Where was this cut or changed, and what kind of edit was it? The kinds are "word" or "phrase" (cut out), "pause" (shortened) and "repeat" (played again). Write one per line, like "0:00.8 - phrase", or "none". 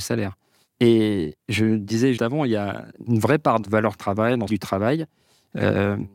0:01.4 - pause
0:02.2 - word
0:03.0 - pause
0:03.6 - phrase
0:04.5 - phrase